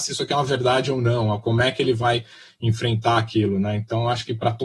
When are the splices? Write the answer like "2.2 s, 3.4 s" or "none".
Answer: none